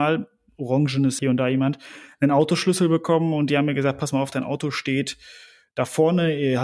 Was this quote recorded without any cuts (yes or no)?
no